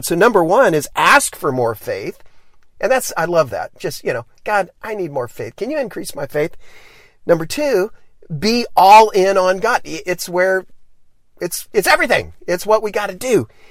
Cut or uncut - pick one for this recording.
uncut